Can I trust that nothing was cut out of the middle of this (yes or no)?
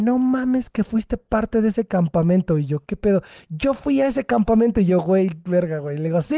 yes